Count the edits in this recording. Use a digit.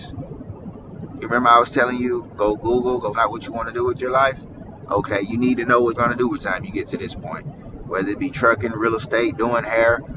3